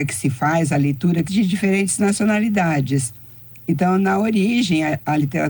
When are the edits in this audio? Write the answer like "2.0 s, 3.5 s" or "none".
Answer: 1.3 s